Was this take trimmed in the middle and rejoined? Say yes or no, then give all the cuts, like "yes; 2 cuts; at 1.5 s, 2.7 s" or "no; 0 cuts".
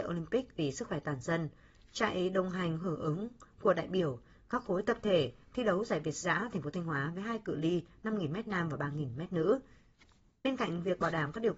no; 0 cuts